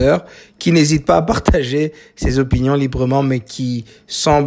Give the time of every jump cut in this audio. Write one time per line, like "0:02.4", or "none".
none